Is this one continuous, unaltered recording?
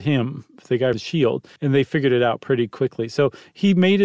no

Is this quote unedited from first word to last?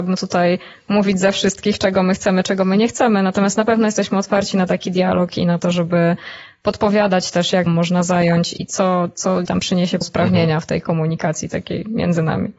no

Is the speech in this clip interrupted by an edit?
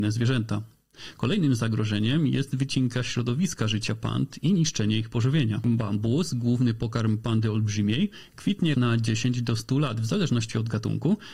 yes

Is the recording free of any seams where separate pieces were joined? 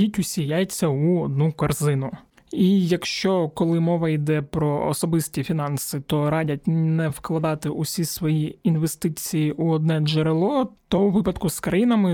yes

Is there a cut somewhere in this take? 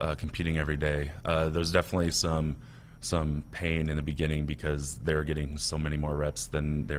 no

